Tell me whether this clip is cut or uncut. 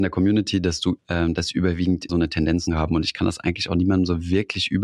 cut